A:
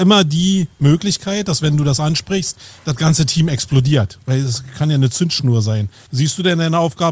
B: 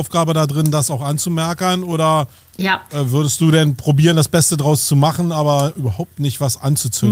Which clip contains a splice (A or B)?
A